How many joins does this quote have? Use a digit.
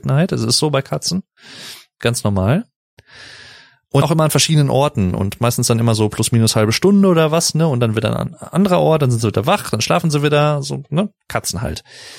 1